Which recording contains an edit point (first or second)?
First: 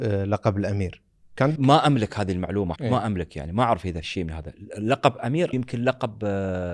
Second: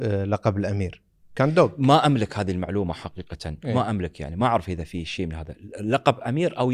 first